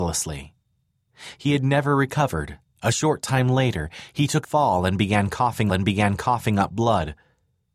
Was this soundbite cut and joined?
yes; 3 cuts; at 2.7 s, 4.4 s, 5.7 s

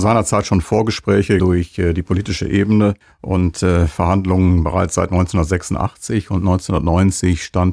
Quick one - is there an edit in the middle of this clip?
yes; 2 cuts; at 1.4 s, 3.0 s

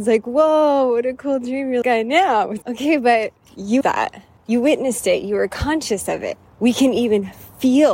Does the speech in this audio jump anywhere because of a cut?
yes; 3 cuts; at 1.8 s, 2.6 s, 3.8 s

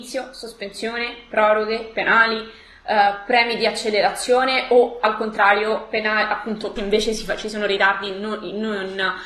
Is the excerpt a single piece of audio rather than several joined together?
no; 1 cut; at 6.8 s

